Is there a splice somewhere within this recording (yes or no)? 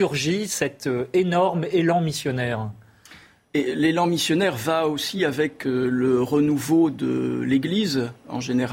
no